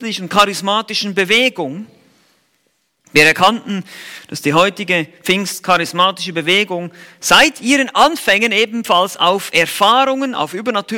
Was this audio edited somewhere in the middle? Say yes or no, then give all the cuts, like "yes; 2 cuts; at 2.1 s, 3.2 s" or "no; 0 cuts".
no; 0 cuts